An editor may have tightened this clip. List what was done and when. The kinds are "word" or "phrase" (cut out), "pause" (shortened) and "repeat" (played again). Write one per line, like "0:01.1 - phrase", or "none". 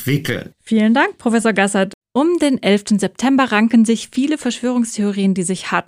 0:02.0 - pause